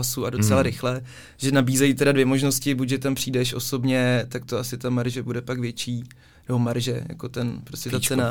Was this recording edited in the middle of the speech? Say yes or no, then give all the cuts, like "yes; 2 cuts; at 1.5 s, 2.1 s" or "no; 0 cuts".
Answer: no; 0 cuts